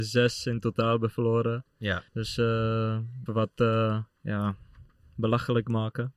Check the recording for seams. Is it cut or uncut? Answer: cut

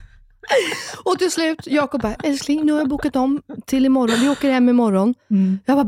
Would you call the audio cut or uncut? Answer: cut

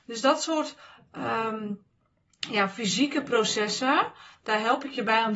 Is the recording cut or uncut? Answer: uncut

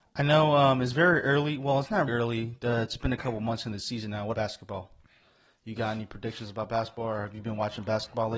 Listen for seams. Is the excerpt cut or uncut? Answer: cut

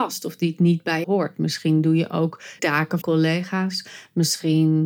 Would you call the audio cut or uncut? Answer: cut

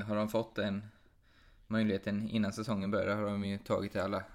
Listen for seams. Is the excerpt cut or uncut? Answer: uncut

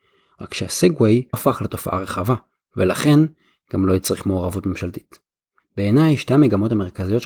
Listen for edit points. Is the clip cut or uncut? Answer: cut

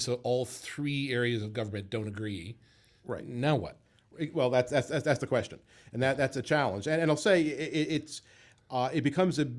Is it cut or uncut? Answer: uncut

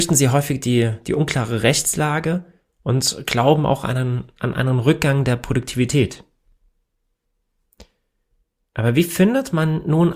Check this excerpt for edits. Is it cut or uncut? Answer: uncut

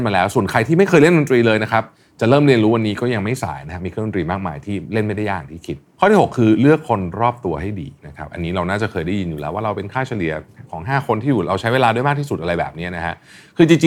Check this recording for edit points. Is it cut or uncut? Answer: cut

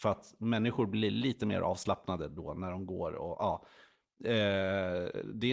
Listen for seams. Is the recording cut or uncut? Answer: uncut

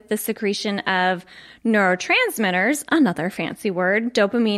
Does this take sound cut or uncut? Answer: uncut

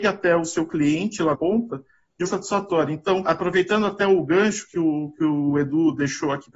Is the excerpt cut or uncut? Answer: cut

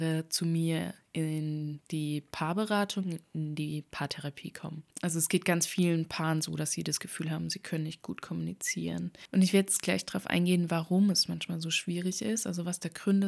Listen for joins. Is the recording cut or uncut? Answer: cut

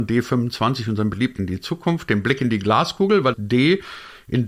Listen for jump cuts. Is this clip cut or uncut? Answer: cut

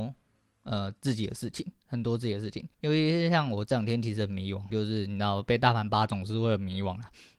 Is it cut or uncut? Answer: cut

